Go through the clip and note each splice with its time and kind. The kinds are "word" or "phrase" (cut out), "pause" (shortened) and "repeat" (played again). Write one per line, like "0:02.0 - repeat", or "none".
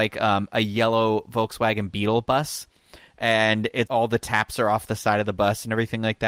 0:03.9 - word